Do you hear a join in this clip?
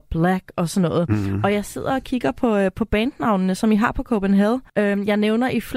yes; 1 cut; at 4.7 s

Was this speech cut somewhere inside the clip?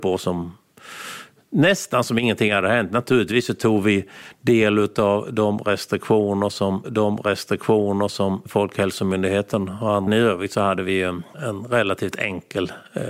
yes; 2 cuts; at 6.8 s, 10.1 s

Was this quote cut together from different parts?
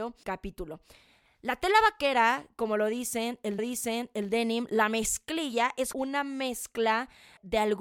yes; 2 cuts; at 3.6 s, 5.9 s

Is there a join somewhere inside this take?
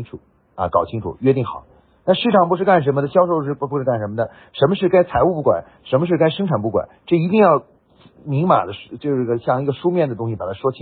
no; 0 cuts

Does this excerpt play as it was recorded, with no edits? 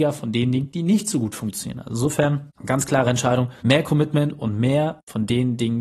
no; 2 cuts; at 2.5 s, 3.6 s

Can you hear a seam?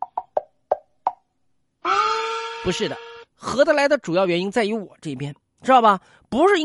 no; 0 cuts

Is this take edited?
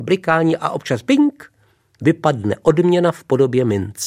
no; 0 cuts

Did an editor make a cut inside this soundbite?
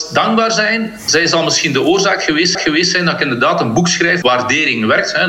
yes; 2 cuts; at 2.5 s, 4.2 s

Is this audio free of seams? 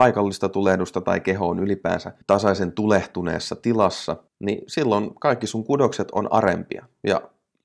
no; 2 cuts; at 2.2 s, 4.3 s

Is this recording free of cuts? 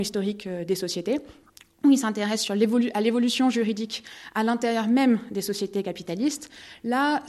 yes; 0 cuts

